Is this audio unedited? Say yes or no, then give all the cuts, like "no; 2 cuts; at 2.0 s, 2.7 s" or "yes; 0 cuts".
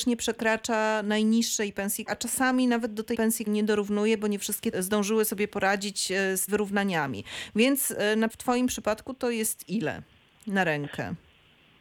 no; 6 cuts; at 2.1 s, 3.1 s, 3.5 s, 4.7 s, 6.5 s, 8.3 s